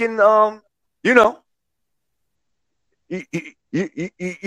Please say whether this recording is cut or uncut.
uncut